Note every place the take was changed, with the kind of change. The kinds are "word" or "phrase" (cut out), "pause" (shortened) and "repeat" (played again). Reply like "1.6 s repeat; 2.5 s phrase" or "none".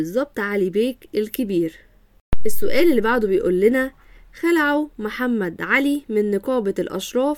none